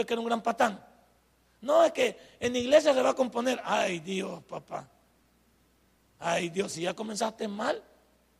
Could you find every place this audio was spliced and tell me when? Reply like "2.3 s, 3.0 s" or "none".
none